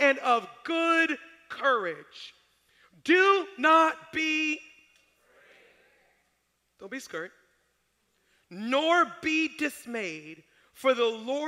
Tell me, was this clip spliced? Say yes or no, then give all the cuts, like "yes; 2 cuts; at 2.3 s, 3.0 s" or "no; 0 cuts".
no; 0 cuts